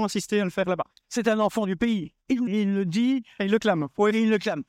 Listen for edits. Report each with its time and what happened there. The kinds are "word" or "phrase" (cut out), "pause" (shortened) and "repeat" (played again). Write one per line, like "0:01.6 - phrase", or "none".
0:01.0 - pause
0:02.5 - word